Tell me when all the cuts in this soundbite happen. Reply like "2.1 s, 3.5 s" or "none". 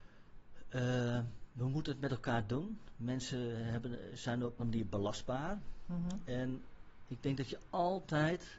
4.6 s, 7.1 s